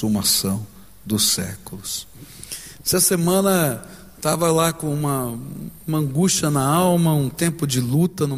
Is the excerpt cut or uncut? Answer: uncut